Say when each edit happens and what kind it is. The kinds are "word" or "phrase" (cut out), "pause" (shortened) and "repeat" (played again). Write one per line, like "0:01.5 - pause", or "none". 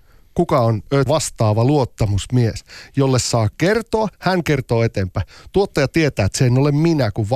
0:01.1 - word
0:04.1 - pause